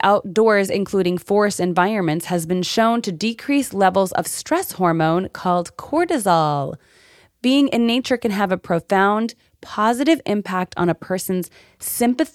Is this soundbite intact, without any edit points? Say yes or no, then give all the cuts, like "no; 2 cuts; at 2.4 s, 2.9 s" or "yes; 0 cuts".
yes; 0 cuts